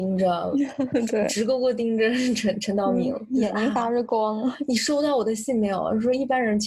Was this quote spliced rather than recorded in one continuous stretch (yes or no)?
no